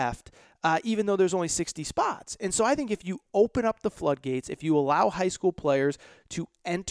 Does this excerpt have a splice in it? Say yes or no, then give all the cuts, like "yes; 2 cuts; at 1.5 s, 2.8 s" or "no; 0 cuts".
no; 0 cuts